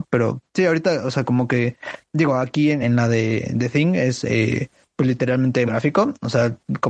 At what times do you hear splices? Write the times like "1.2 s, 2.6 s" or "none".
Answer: 2.8 s, 5.7 s